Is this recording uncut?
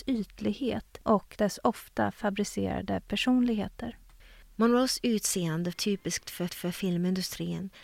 no; 3 cuts; at 1.0 s, 5.7 s, 6.5 s

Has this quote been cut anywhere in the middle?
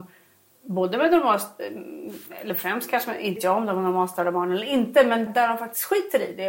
yes; 2 cuts; at 3.4 s, 5.3 s

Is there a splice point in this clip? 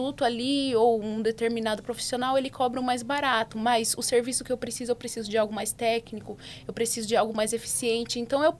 no; 0 cuts

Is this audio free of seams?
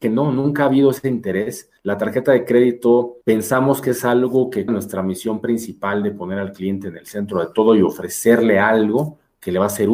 no; 3 cuts; at 1.8 s, 3.2 s, 4.7 s

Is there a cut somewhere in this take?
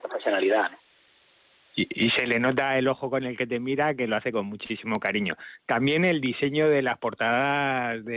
no; 0 cuts

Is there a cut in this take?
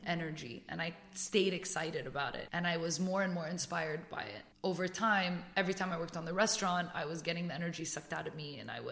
no; 0 cuts

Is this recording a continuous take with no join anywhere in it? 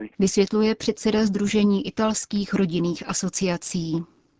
yes; 0 cuts

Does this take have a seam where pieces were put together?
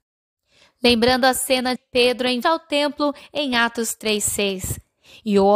yes; 2 cuts; at 1.8 s, 2.4 s

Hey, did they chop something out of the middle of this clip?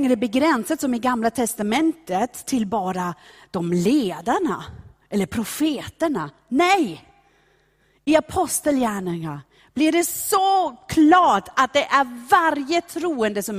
no; 0 cuts

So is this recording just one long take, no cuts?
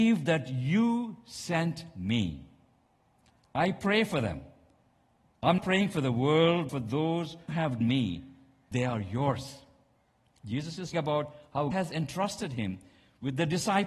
no; 7 cuts; at 5.6 s, 6.7 s, 7.5 s, 7.8 s, 8.7 s, 10.9 s, 11.7 s

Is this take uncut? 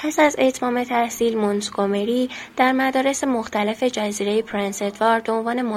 yes; 0 cuts

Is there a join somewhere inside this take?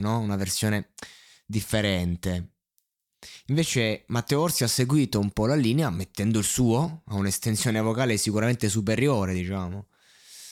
no; 0 cuts

